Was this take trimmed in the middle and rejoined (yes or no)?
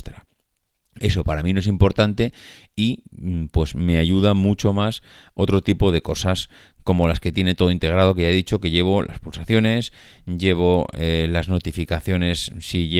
no